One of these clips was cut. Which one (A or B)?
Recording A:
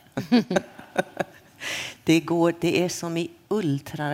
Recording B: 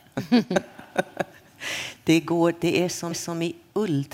B